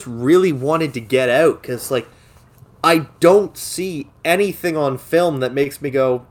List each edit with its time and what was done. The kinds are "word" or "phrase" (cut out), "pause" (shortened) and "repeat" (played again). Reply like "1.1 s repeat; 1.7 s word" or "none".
none